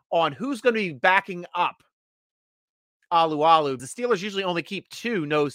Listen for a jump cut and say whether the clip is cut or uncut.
cut